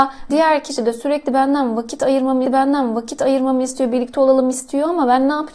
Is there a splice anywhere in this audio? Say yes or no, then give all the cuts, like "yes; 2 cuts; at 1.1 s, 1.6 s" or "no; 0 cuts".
yes; 1 cut; at 2.5 s